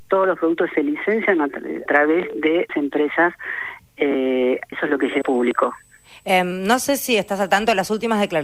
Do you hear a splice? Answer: yes; 4 cuts; at 1.9 s, 2.7 s, 4.7 s, 5.2 s

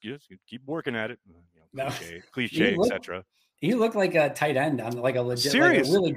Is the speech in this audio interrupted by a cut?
no; 0 cuts

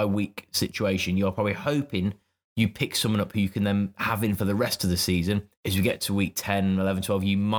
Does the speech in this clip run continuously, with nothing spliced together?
yes; 0 cuts

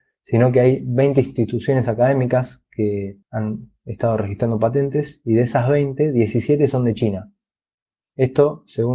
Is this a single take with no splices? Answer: yes; 0 cuts

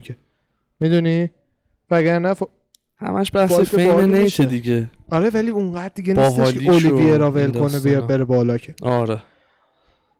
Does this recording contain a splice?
no; 0 cuts

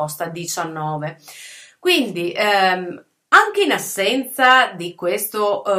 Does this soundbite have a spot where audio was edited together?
no; 0 cuts

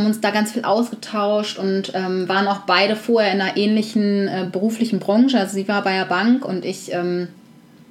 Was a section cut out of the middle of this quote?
no; 0 cuts

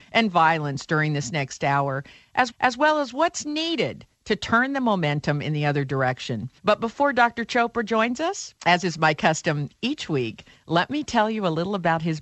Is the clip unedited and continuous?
no; 3 cuts; at 2.5 s, 6.6 s, 8.6 s

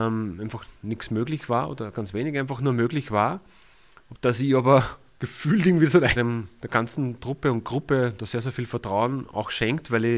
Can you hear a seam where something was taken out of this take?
yes; 2 cuts; at 1.9 s, 6.2 s

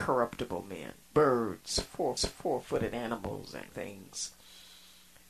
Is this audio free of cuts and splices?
no; 3 cuts; at 1.0 s, 2.2 s, 3.7 s

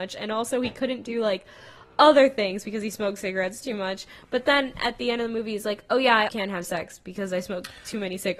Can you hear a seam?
yes; 1 cut; at 6.3 s

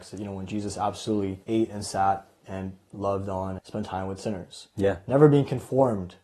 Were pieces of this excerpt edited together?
yes; 2 cuts; at 1.4 s, 3.6 s

